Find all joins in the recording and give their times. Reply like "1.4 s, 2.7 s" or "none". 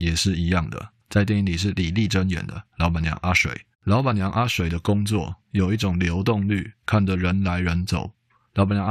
1.0 s, 3.7 s, 6.8 s